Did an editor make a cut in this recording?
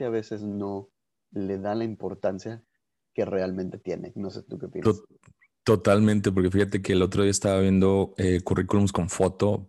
no; 0 cuts

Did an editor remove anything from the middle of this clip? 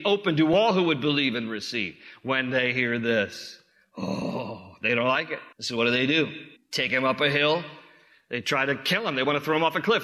yes; 2 cuts; at 5.5 s, 6.6 s

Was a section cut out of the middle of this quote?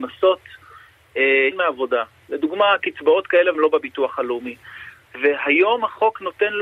yes; 2 cuts; at 1.5 s, 3.5 s

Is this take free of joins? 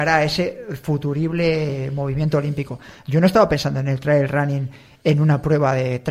yes; 0 cuts

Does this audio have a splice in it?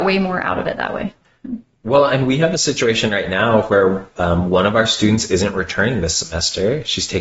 no; 0 cuts

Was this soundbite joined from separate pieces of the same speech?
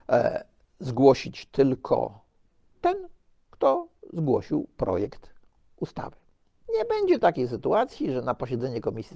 no; 0 cuts

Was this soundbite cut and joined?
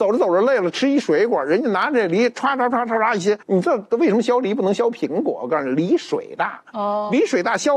yes; 1 cut; at 3.4 s

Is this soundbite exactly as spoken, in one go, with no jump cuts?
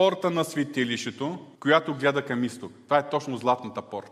no; 1 cut; at 1.5 s

